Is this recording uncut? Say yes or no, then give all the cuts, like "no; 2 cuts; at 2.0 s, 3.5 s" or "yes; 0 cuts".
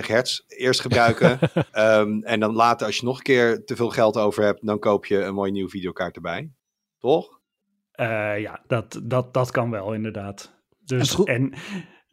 no; 2 cuts; at 1.7 s, 7.6 s